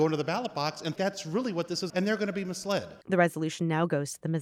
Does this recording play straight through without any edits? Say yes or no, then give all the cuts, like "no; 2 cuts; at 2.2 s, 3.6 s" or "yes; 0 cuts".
no; 3 cuts; at 1.0 s, 1.9 s, 3.0 s